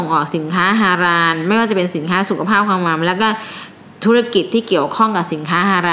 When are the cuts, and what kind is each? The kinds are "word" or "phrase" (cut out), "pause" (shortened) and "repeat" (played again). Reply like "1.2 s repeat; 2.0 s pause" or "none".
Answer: none